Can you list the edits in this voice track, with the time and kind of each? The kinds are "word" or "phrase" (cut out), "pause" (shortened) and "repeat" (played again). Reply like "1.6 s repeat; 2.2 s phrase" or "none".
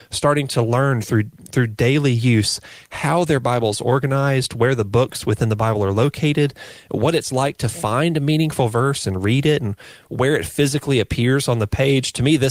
none